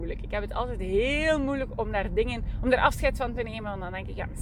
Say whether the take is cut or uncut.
uncut